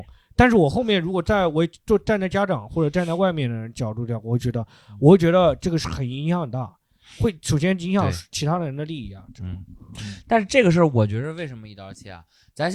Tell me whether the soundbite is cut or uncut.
uncut